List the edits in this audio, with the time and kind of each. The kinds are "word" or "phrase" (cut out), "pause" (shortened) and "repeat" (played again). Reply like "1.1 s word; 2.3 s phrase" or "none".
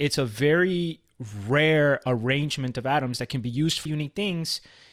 3.9 s word